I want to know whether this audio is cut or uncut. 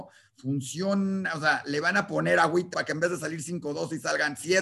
cut